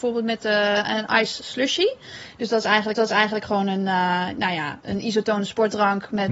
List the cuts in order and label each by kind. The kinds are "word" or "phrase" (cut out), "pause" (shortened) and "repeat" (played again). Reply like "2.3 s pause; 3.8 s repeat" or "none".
2.9 s repeat; 4.8 s word